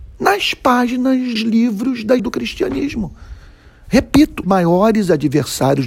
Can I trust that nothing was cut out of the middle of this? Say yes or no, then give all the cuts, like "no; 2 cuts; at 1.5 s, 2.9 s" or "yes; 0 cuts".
no; 3 cuts; at 1.4 s, 2.2 s, 4.4 s